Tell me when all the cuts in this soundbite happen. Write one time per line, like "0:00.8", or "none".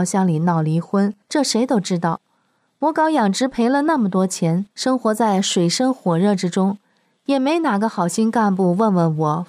0:01.2
0:04.7